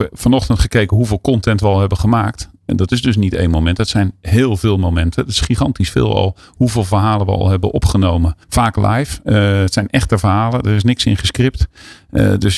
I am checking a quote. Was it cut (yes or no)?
yes